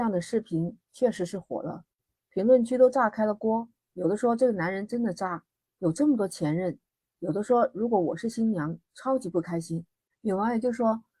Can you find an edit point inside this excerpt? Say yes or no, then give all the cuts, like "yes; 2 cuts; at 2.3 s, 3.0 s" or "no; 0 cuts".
no; 0 cuts